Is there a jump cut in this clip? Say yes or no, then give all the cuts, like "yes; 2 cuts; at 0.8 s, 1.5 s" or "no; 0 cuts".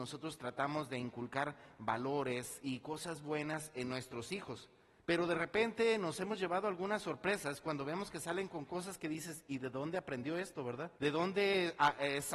yes; 2 cuts; at 5.0 s, 11.0 s